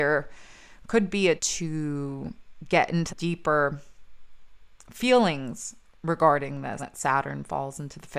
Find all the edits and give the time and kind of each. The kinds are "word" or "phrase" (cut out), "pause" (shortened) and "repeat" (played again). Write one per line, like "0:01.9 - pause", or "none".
0:01.4 - word
0:03.1 - word
0:06.8 - word